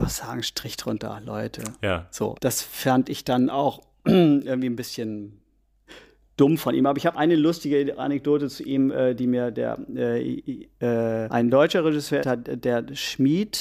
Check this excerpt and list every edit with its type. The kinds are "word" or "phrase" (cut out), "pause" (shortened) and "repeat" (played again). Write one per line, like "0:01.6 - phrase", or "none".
0:02.4 - word
0:07.1 - word
0:11.3 - word
0:12.2 - word